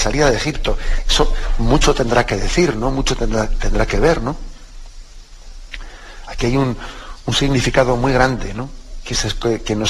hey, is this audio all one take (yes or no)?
yes